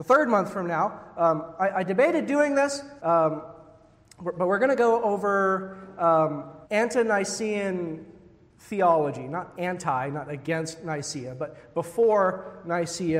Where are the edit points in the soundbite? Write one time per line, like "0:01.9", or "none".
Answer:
0:03.0
0:06.6